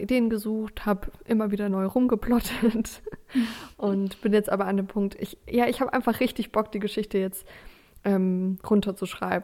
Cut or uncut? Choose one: uncut